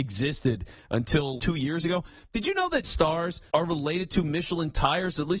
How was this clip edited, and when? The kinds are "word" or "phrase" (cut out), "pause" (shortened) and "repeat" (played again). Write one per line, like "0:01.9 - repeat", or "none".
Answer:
0:01.4 - word
0:02.8 - word
0:03.5 - pause